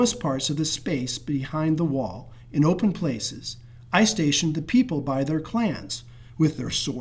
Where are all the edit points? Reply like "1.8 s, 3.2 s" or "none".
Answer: none